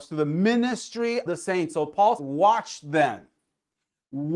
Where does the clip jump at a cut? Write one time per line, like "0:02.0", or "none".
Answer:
0:01.3
0:02.2